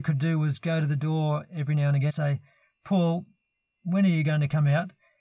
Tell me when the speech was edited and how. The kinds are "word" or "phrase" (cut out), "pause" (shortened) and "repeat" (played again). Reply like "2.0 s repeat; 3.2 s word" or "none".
2.1 s word